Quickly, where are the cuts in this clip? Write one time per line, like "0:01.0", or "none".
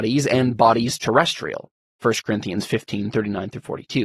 none